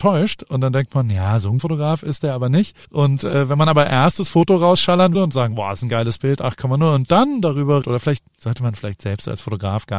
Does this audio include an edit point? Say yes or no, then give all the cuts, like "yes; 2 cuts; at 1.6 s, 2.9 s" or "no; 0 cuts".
yes; 4 cuts; at 1.6 s, 2.8 s, 5.1 s, 7.8 s